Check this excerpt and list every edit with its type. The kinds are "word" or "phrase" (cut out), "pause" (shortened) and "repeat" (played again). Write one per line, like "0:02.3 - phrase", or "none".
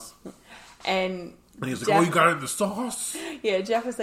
none